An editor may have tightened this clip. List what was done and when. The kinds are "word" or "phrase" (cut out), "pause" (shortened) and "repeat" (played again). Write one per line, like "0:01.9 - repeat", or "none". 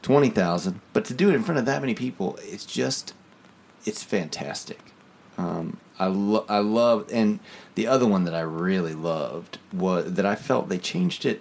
none